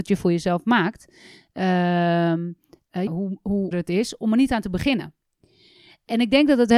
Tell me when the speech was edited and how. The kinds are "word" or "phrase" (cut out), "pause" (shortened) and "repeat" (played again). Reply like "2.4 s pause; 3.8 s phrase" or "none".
3.1 s word; 3.7 s word